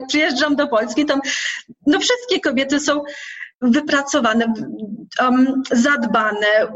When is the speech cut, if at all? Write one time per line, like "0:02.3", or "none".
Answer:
0:03.5

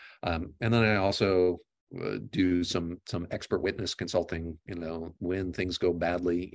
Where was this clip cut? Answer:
none

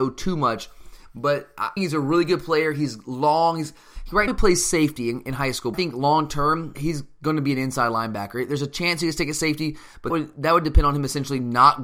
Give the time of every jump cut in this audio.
0:01.8
0:04.3
0:05.7
0:06.7
0:10.1

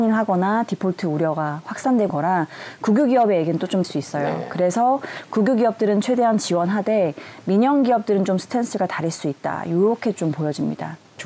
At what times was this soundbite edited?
0:02.1
0:03.8

